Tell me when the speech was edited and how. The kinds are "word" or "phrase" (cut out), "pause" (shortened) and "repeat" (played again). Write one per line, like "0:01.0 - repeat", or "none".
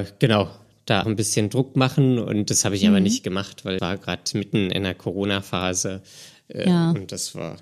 0:01.0 - word
0:03.8 - word